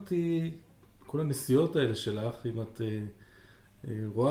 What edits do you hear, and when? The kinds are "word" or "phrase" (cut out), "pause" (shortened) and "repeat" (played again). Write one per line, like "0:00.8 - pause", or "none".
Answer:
none